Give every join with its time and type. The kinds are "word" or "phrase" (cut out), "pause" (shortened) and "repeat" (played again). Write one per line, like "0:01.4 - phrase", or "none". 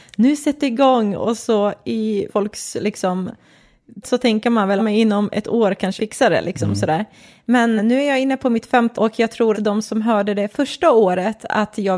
0:02.3 - word
0:04.0 - word
0:04.8 - word
0:06.0 - word
0:07.8 - word
0:08.9 - word
0:09.5 - word